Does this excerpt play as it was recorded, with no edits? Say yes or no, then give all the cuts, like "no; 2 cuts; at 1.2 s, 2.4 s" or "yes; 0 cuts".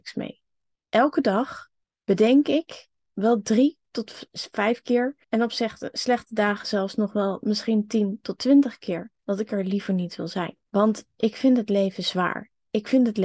no; 4 cuts; at 1.8 s, 5.2 s, 9.2 s, 10.7 s